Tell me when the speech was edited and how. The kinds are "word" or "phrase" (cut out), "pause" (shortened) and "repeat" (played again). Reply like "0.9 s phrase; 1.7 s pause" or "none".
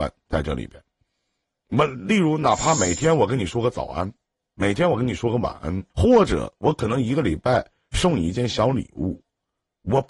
5.9 s pause